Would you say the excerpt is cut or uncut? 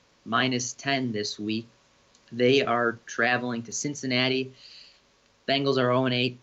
uncut